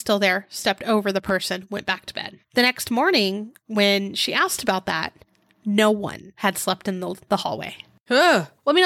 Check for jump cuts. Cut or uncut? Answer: cut